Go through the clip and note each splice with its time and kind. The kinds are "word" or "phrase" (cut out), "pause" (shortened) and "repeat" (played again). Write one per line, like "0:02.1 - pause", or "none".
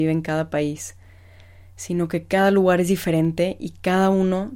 none